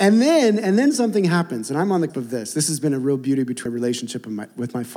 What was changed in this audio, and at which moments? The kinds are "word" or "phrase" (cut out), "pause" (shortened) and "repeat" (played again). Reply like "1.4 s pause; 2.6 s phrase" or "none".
2.1 s word; 3.7 s word